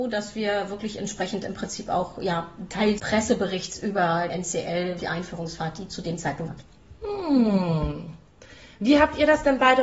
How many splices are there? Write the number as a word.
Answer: four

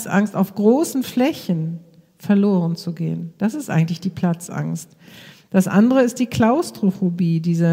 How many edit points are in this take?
zero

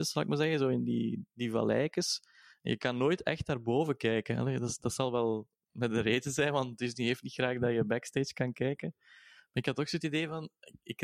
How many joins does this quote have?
zero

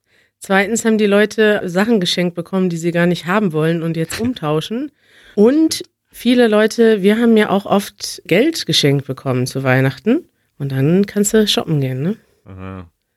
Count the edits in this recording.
five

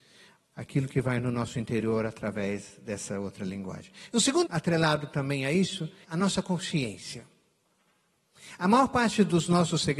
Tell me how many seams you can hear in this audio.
two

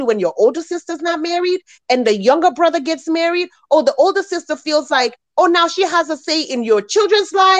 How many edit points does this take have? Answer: zero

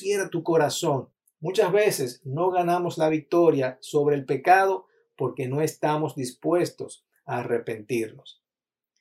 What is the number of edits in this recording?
zero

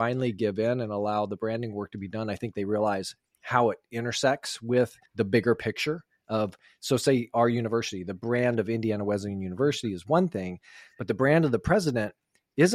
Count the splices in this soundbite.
one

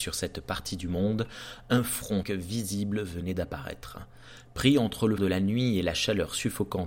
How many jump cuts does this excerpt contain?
two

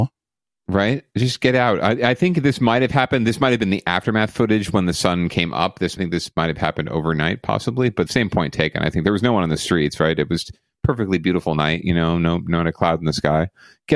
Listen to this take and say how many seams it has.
two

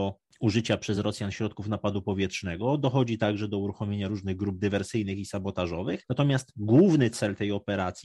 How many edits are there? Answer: zero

